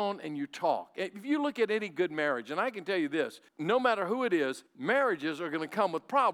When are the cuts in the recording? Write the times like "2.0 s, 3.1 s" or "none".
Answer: 3.5 s, 4.7 s